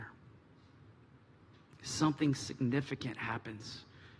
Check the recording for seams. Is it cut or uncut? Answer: uncut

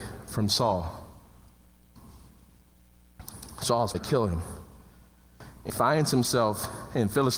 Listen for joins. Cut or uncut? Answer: cut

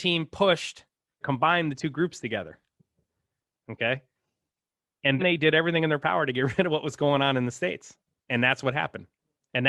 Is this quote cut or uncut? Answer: cut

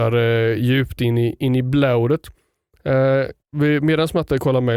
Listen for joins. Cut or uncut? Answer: cut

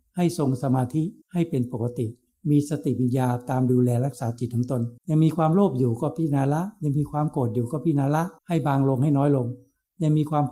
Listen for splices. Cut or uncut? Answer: cut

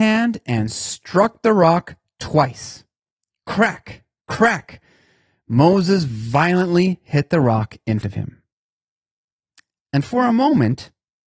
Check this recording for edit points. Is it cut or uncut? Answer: cut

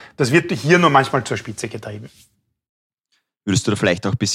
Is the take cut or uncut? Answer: uncut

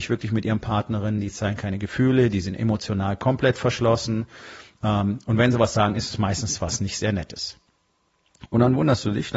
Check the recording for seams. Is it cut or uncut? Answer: uncut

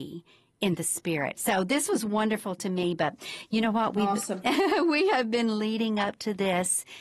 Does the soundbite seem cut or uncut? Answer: uncut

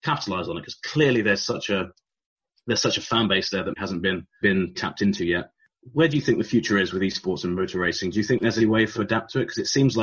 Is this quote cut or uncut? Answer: cut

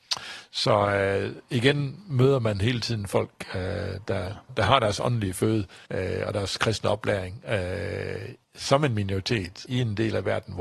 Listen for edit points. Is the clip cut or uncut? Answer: cut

